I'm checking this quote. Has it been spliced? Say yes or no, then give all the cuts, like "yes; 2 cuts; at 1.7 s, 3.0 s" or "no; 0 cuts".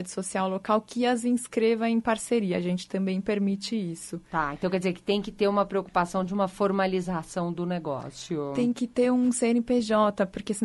no; 0 cuts